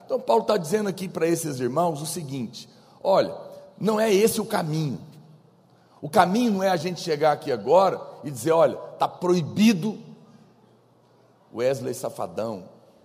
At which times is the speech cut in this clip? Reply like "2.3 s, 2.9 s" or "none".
none

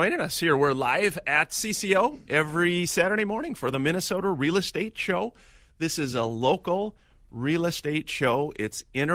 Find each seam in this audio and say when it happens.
none

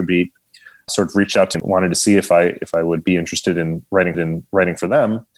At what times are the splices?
1.5 s, 4.1 s

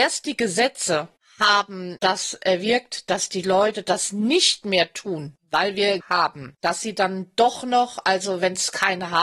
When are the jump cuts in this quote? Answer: 6.0 s

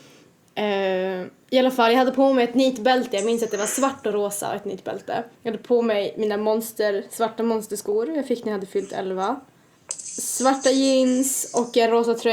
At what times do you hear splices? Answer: 5.3 s

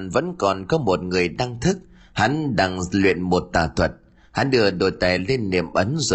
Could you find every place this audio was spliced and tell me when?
none

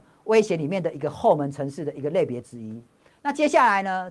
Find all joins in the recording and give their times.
none

